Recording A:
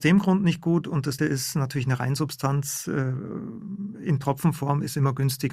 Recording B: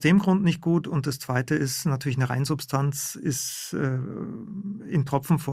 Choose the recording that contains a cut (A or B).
A